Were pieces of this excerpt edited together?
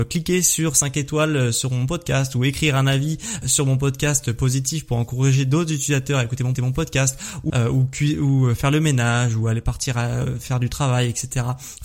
yes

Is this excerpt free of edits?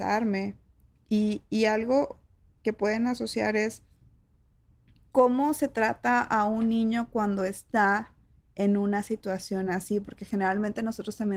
yes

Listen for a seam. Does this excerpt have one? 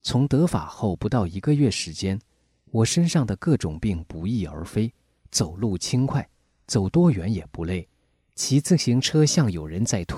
no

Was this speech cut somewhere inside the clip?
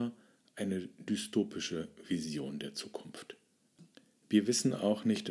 no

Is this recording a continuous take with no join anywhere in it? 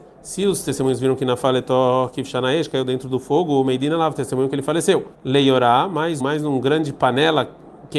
no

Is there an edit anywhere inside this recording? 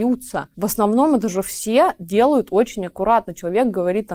no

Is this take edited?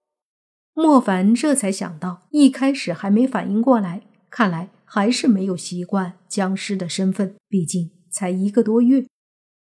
yes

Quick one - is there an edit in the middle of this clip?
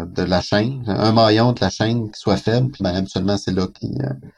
yes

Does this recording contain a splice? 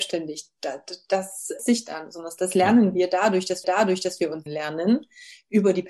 yes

